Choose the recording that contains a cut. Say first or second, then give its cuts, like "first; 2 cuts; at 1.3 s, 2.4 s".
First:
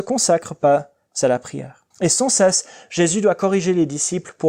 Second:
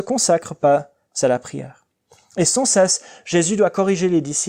first; 1 cut; at 1.9 s